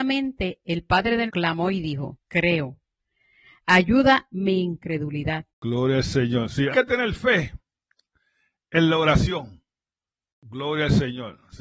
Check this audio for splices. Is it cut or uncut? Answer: cut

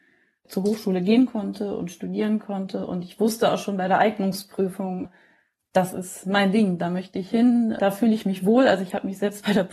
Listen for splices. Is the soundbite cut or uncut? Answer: uncut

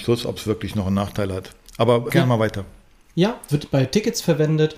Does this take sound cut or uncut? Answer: cut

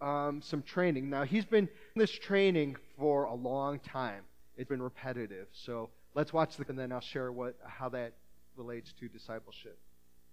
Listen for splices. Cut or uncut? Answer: cut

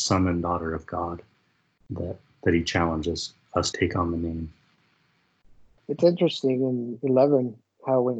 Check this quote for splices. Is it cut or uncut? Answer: cut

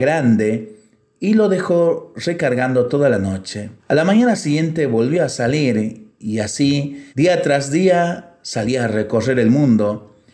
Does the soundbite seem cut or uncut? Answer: cut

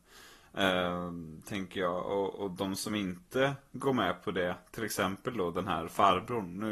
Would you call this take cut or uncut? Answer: uncut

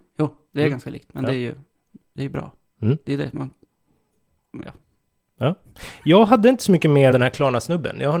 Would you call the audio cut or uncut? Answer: cut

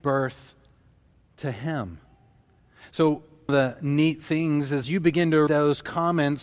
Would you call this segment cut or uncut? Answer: cut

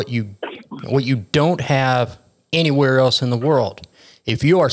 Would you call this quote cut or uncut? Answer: uncut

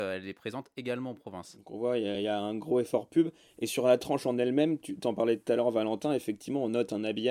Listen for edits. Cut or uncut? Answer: uncut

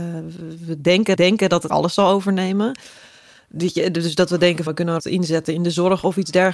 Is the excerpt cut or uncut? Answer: cut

